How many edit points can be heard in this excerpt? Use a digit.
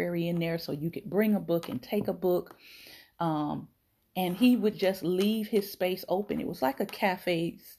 0